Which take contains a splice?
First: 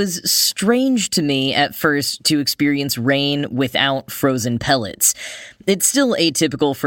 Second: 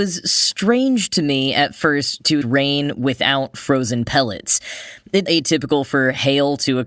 second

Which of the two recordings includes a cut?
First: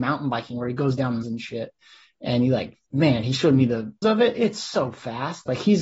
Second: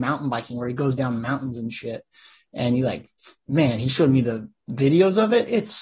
first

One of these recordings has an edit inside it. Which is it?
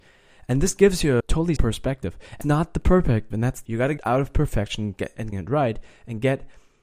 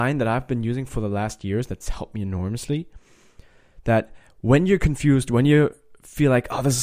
first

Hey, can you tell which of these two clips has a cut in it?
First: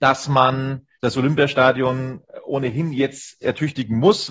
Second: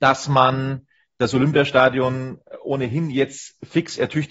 first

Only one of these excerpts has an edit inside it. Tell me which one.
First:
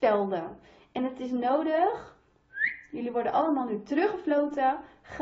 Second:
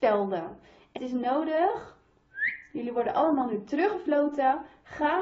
second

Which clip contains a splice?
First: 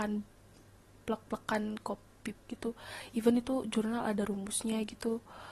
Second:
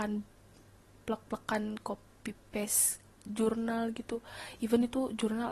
first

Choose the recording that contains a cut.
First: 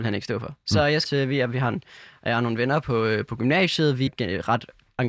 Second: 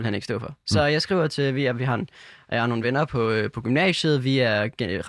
first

